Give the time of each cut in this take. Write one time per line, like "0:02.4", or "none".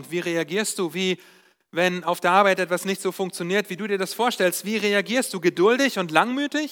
none